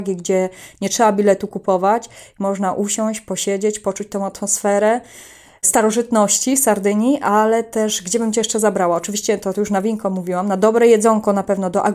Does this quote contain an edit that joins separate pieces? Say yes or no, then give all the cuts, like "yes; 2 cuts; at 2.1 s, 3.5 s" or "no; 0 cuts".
no; 0 cuts